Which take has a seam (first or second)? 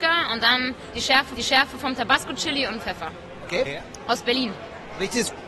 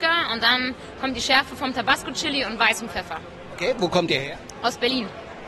first